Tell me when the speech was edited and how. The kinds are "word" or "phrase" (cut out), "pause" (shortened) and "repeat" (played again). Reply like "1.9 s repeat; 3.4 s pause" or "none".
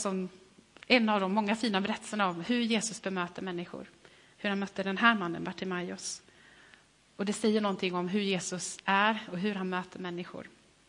none